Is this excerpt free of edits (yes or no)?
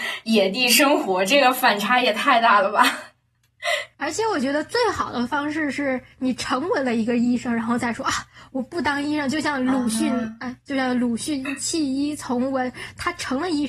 no